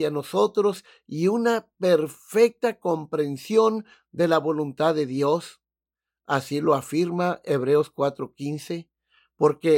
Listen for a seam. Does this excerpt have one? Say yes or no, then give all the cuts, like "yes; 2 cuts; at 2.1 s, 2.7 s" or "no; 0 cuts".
no; 0 cuts